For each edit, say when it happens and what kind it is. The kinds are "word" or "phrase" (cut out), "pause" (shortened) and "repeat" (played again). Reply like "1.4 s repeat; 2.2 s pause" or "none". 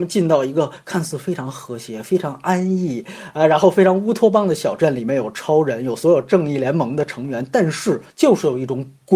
8.1 s pause